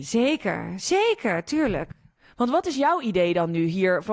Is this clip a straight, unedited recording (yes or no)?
yes